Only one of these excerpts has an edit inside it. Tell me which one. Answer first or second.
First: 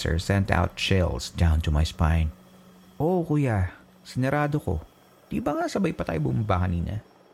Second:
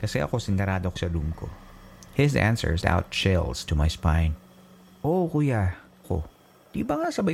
second